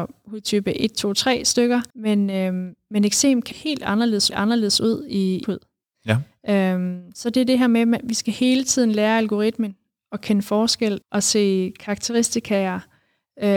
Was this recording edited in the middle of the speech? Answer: yes; 5 cuts; at 1.9 s, 3.5 s, 4.3 s, 5.4 s, 11.0 s

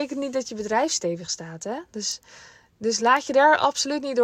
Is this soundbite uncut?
yes; 0 cuts

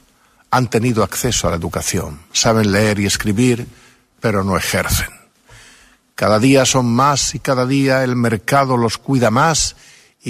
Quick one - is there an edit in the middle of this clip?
no; 0 cuts

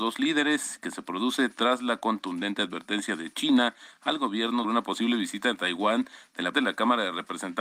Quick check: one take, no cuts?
no; 2 cuts; at 4.6 s, 6.5 s

